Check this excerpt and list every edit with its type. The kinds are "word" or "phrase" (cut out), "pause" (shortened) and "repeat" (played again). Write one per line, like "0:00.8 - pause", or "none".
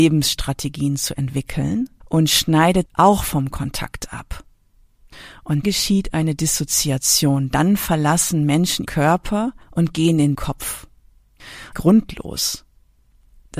0:02.0 - pause
0:02.9 - word
0:05.6 - word
0:08.9 - word
0:09.6 - pause
0:10.3 - word
0:11.7 - phrase